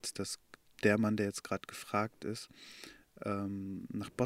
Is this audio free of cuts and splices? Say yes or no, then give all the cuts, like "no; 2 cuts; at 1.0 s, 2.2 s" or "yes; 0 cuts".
yes; 0 cuts